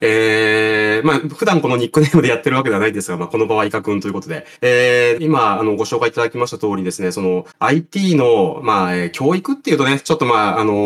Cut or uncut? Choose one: cut